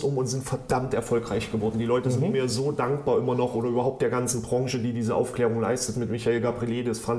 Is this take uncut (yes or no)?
yes